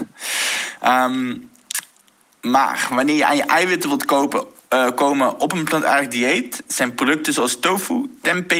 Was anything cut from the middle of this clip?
no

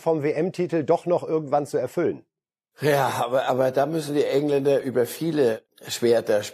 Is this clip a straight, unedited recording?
yes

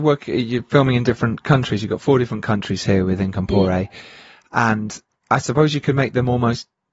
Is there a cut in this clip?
no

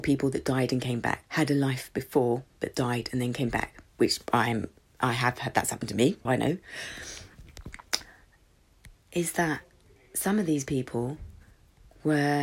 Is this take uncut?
no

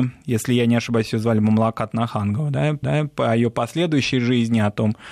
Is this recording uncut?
no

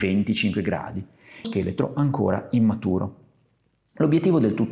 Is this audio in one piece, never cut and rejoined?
no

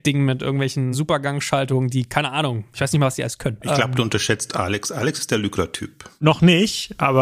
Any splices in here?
no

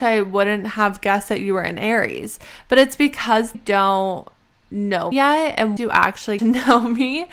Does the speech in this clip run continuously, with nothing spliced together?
no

